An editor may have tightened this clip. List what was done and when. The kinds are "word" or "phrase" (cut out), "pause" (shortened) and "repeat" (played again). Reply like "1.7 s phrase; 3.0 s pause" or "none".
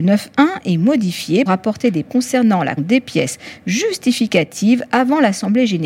1.5 s word; 2.1 s word; 2.8 s word